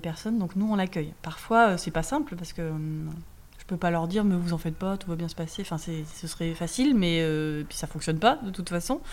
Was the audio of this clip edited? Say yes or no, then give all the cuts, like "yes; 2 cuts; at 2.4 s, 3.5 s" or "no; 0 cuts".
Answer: no; 0 cuts